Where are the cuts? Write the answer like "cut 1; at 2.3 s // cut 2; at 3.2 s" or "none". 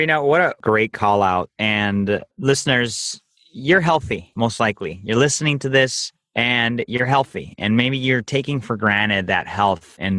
cut 1; at 2.3 s